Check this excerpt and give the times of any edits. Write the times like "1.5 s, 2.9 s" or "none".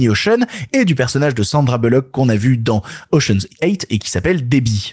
none

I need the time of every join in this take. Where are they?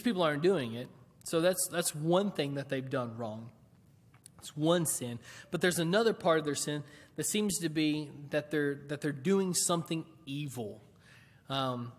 none

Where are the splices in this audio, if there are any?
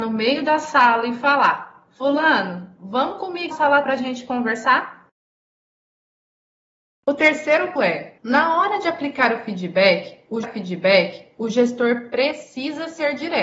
3.5 s, 3.8 s, 7.8 s, 8.2 s, 10.4 s

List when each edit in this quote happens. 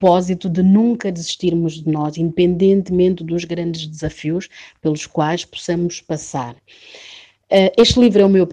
none

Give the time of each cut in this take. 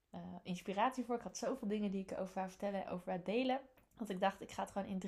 3.8 s

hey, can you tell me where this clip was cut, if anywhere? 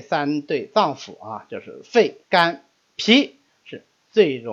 2.2 s

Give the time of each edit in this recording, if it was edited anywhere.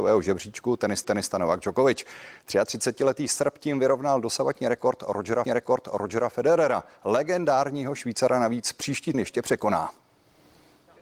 1.0 s, 5.5 s, 9.1 s

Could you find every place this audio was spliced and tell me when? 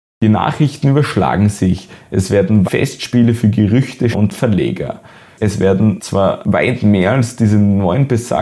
2.6 s, 4.1 s

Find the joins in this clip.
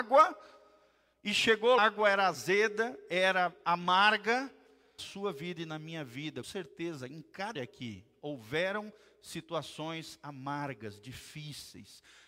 1.8 s, 5.0 s, 6.4 s, 7.5 s

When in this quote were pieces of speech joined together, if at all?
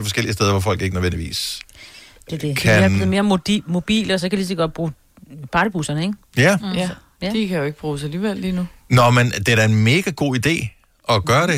none

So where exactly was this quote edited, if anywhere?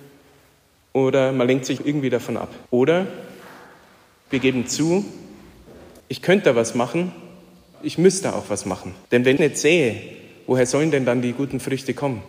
1.8 s, 2.7 s, 6.0 s, 7.7 s, 9.1 s, 9.4 s

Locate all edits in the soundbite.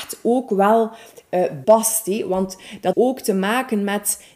1.6 s, 2.9 s

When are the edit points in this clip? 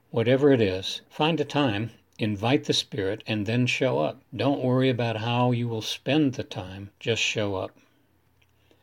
1.0 s, 4.3 s, 6.9 s

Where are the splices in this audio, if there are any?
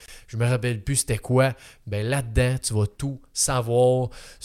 none

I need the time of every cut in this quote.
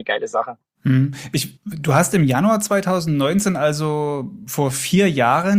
1.6 s

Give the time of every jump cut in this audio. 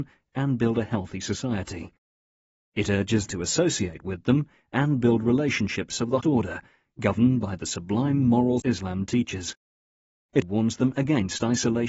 3.3 s, 6.2 s, 8.6 s, 10.4 s

